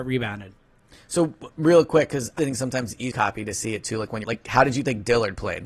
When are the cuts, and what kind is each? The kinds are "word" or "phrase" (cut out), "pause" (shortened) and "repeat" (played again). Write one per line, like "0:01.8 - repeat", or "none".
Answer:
0:02.4 - word
0:03.1 - phrase
0:04.2 - phrase

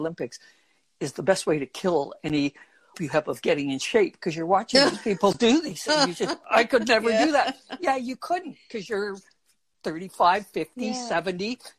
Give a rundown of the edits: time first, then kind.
0:02.9 - word

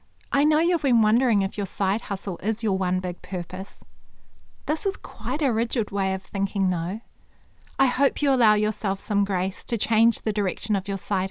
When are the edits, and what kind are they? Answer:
none

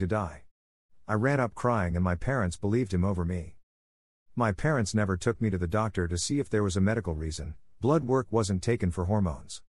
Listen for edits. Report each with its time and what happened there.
none

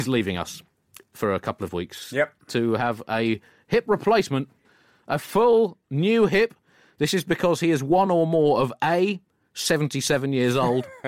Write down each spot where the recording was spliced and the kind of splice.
none

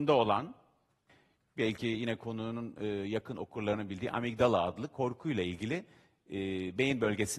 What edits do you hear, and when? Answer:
none

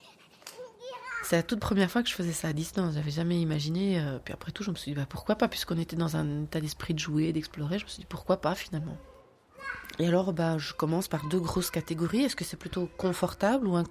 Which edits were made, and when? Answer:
none

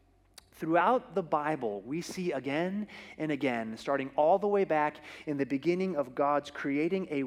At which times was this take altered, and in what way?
none

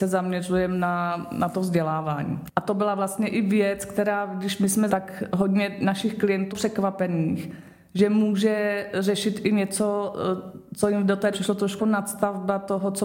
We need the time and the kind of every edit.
0:04.9 - word
0:06.5 - word
0:11.3 - word
0:11.8 - word

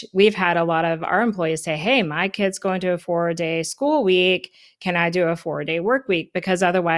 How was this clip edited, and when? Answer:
none

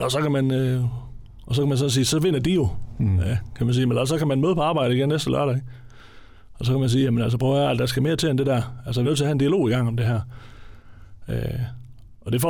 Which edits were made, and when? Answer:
0:09.0 - word

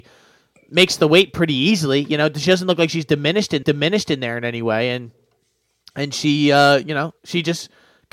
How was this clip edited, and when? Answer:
0:03.6 - repeat
0:07.2 - pause

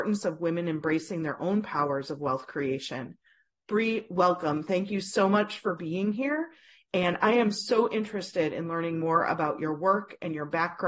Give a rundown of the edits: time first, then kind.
none

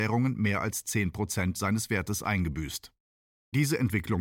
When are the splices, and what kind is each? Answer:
none

